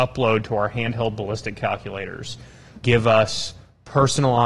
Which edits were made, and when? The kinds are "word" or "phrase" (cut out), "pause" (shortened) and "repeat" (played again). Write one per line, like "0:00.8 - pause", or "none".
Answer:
0:02.8 - word